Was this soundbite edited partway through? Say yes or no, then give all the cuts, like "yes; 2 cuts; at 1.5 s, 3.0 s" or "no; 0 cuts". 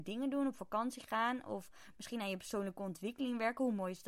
no; 0 cuts